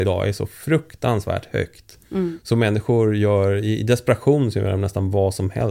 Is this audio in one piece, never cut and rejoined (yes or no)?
yes